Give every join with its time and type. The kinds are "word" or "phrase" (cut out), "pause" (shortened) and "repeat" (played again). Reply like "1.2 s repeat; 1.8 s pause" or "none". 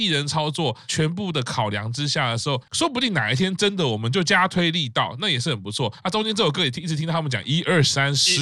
2.7 s word